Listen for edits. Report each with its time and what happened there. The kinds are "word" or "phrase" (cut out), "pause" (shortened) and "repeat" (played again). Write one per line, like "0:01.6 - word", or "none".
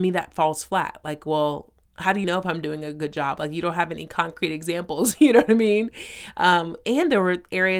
0:02.2 - word